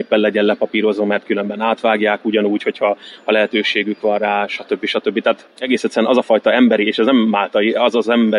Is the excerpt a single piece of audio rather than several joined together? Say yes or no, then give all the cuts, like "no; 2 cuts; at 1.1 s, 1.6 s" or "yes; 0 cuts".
no; 1 cut; at 5.5 s